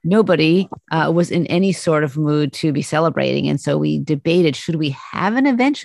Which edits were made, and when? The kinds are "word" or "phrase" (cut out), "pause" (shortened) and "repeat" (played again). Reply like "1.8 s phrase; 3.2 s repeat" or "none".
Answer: 2.5 s word

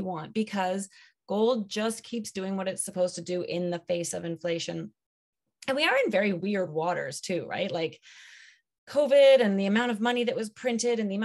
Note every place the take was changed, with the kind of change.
none

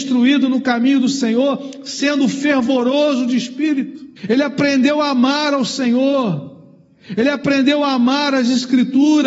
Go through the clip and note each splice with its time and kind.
4.2 s pause

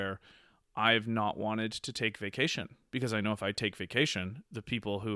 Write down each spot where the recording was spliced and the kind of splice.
none

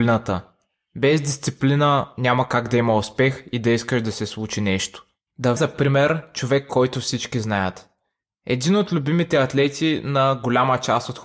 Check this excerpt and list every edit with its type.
5.6 s word

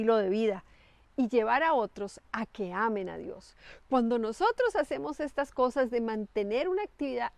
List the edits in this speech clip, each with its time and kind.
none

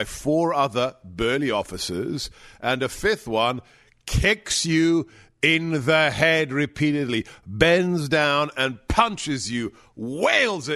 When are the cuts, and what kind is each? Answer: none

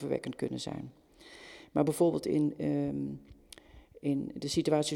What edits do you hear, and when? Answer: none

